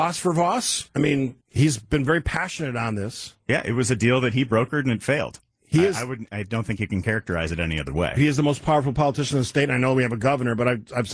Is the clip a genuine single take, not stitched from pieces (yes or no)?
no